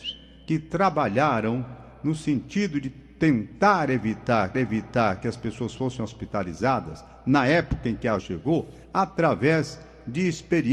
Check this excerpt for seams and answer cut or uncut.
cut